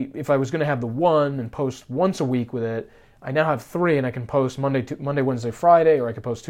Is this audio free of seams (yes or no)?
yes